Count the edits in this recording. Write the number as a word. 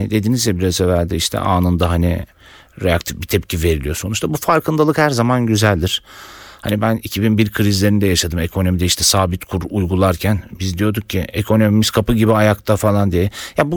zero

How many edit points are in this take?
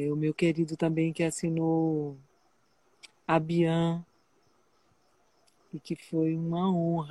zero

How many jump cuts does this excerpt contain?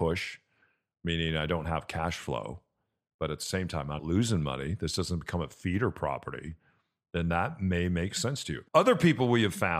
two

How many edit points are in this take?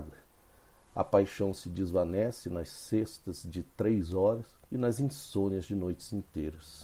one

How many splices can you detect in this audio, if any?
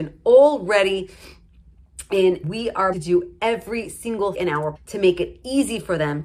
four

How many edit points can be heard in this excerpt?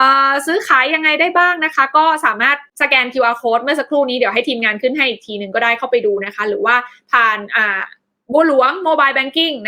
zero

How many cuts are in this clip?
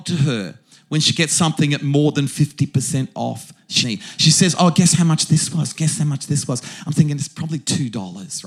one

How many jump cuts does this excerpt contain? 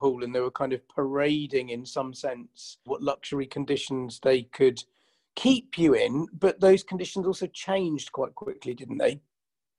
one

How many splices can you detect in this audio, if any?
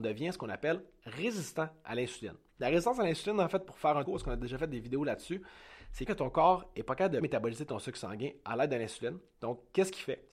three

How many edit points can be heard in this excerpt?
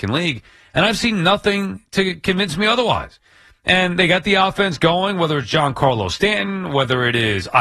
zero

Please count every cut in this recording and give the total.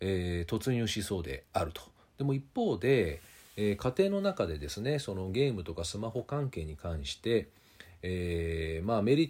zero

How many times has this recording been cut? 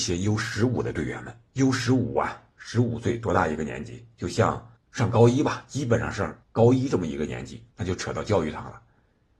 four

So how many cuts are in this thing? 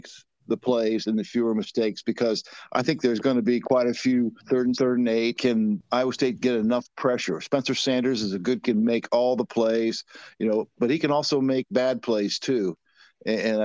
three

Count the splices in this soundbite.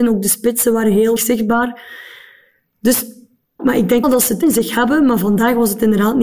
four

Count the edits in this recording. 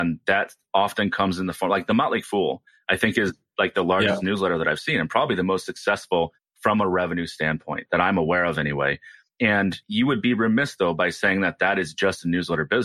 zero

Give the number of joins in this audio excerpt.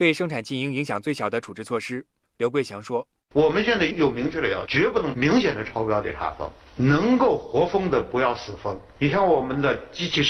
one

